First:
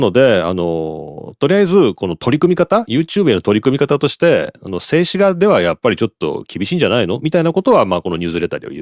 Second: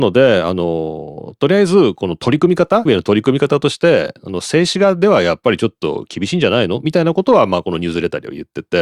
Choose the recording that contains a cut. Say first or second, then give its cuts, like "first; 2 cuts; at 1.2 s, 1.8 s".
second; 1 cut; at 2.9 s